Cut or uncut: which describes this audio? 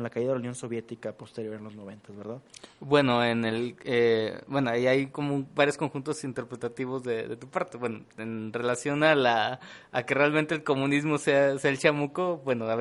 uncut